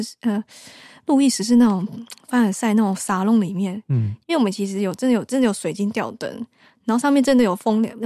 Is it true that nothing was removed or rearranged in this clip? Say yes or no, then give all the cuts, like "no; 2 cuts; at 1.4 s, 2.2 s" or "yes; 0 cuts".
yes; 0 cuts